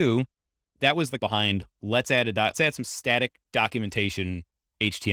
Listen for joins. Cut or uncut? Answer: cut